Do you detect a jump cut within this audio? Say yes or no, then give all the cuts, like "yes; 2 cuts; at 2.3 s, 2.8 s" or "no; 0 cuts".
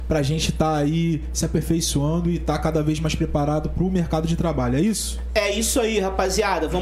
no; 0 cuts